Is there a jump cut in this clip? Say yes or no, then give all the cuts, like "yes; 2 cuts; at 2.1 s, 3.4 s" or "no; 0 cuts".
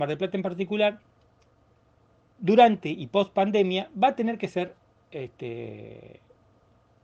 no; 0 cuts